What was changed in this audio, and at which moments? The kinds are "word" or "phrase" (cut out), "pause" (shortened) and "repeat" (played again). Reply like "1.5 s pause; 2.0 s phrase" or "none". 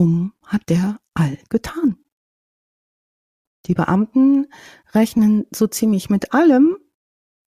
1.5 s word